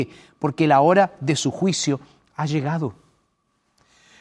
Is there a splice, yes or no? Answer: no